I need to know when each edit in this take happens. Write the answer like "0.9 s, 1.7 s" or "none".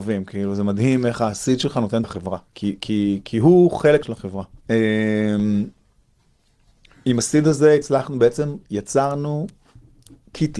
2.0 s, 2.5 s, 3.2 s, 4.0 s, 4.6 s